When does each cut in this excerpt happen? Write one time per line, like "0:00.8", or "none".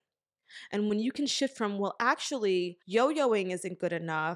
0:02.8